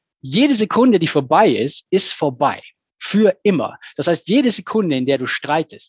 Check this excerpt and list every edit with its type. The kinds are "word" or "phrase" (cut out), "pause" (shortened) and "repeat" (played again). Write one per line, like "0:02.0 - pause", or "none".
none